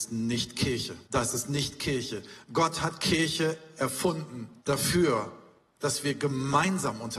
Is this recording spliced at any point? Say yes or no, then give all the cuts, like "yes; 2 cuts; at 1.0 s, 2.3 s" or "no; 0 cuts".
yes; 2 cuts; at 1.0 s, 4.6 s